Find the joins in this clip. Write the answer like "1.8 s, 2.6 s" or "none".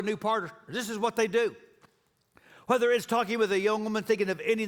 none